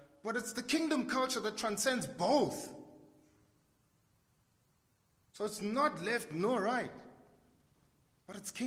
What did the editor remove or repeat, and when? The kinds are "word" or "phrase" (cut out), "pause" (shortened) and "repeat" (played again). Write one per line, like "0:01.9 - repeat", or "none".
none